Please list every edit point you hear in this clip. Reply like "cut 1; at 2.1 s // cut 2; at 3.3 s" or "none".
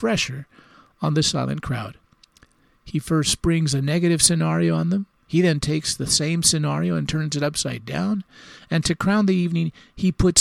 none